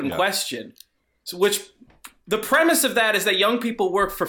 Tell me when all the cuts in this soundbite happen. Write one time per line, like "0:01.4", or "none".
none